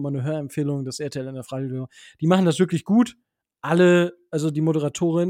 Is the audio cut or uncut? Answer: uncut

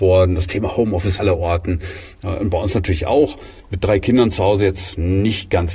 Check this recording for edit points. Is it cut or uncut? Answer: cut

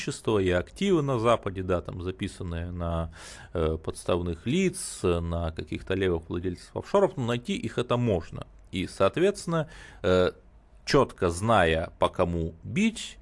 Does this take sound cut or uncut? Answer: uncut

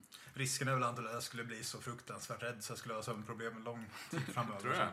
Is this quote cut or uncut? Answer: uncut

